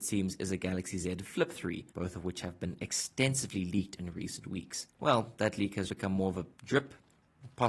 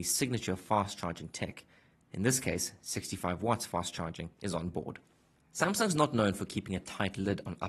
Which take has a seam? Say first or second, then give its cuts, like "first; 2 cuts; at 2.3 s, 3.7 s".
first; 4 cuts; at 1.9 s, 4.9 s, 5.9 s, 6.5 s